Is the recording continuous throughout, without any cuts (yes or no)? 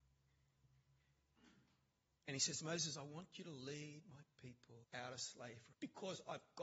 no